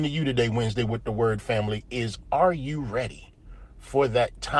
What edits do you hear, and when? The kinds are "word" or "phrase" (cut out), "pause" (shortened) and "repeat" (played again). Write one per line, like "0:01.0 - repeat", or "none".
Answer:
none